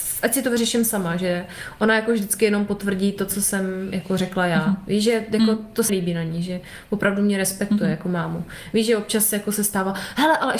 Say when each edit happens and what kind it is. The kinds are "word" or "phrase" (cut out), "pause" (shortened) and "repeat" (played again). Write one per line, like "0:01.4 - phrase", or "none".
0:05.9 - word

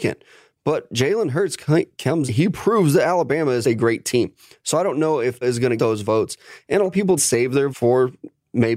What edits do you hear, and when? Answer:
0:02.3 - word
0:03.6 - word
0:05.4 - word
0:05.8 - word
0:06.9 - word
0:07.2 - word
0:07.7 - word

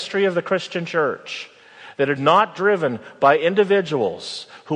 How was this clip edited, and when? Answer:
0:02.2 - word

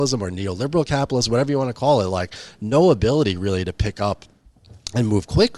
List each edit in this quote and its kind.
none

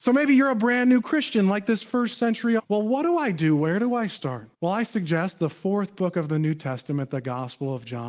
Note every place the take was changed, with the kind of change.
0:02.6 - phrase
0:04.5 - pause

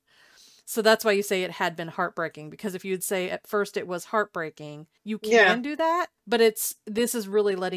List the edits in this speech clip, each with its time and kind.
0:05.0 - pause
0:06.2 - pause

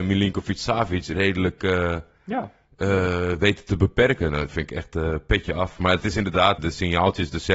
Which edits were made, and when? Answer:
0:06.6 - word

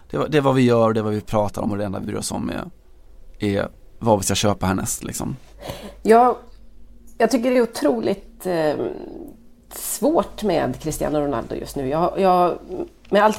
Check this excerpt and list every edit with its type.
none

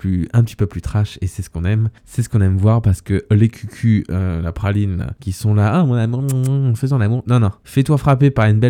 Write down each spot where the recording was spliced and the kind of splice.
0:02.0 - pause

